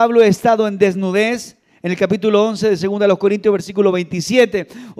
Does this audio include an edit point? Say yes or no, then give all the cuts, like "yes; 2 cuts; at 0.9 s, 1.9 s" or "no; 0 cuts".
no; 0 cuts